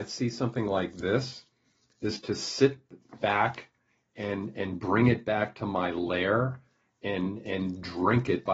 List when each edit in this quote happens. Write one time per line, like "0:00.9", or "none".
none